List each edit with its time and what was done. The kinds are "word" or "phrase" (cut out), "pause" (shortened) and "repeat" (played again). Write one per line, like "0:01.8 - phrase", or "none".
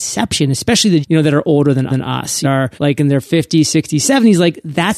0:01.0 - word
0:01.9 - repeat
0:02.4 - phrase
0:02.8 - pause